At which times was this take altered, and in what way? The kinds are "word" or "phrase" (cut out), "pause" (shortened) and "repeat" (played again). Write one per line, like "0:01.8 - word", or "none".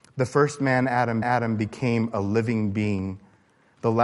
0:01.2 - repeat